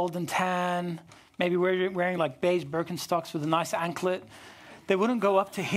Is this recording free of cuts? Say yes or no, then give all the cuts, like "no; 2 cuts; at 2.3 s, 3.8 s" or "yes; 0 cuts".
yes; 0 cuts